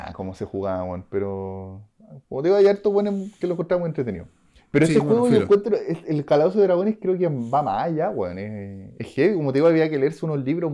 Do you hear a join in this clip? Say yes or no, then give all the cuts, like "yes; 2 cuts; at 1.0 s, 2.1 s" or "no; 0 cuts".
no; 0 cuts